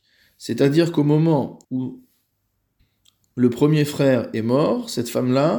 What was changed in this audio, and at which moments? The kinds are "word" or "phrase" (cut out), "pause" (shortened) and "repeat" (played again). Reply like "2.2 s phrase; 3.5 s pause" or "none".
1.6 s pause